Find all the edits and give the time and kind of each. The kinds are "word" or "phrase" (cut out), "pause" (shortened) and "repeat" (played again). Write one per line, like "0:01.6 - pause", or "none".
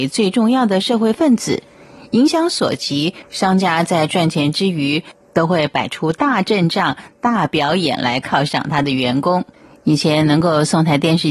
0:03.2 - pause